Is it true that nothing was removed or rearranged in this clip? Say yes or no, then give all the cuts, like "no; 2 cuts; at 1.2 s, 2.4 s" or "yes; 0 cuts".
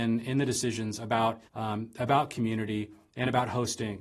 no; 1 cut; at 1.5 s